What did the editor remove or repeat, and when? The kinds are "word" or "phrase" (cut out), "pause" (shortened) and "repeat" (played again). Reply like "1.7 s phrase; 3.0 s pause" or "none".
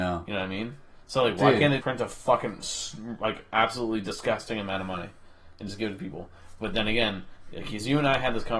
1.8 s word